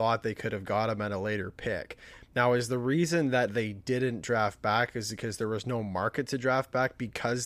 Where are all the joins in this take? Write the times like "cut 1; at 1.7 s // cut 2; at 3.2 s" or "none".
none